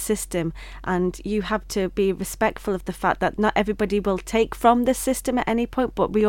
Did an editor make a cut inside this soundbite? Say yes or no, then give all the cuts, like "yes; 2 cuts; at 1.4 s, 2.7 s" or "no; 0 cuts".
no; 0 cuts